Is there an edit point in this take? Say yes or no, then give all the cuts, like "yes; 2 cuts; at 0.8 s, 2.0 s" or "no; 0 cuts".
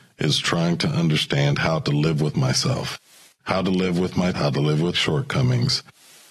yes; 2 cuts; at 4.3 s, 4.9 s